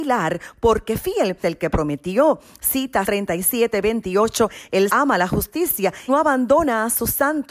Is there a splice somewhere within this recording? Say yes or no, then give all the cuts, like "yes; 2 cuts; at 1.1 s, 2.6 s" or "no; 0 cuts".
yes; 4 cuts; at 1.4 s, 3.0 s, 4.9 s, 6.1 s